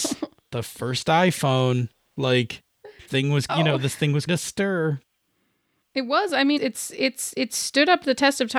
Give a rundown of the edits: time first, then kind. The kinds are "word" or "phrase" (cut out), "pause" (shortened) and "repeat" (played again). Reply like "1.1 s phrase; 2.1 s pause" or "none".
3.1 s word; 3.5 s word; 4.3 s word; 6.6 s word